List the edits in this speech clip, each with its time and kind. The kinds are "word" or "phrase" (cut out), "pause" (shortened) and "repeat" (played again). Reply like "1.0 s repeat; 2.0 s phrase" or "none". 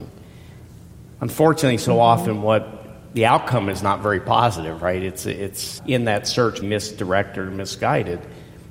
5.8 s word; 6.6 s word